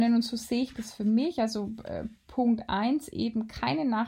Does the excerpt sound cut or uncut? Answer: uncut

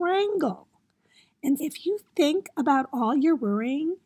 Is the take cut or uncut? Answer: cut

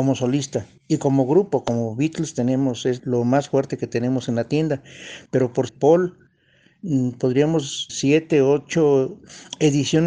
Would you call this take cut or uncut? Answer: cut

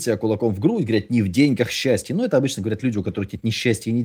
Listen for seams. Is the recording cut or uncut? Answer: uncut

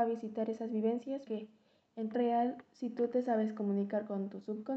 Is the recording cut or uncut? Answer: cut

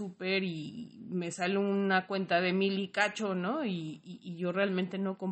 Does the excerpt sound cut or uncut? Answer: uncut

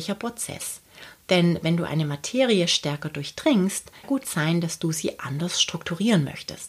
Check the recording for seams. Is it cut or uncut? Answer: cut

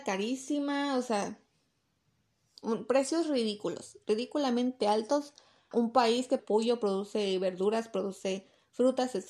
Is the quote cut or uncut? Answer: cut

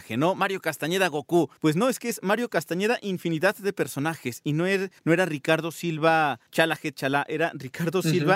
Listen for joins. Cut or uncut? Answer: cut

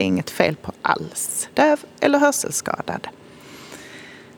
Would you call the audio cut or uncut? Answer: cut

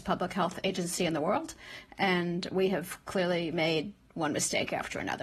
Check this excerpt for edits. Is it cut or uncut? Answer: uncut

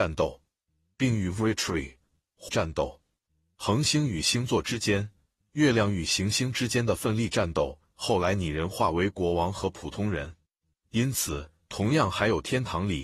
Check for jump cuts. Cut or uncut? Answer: cut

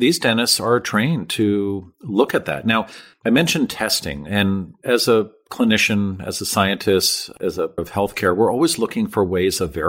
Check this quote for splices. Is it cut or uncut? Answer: cut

